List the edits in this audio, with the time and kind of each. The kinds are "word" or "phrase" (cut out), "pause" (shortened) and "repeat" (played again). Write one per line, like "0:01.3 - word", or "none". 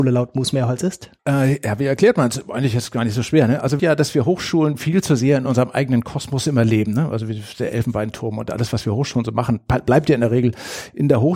0:01.2 - pause
0:03.8 - phrase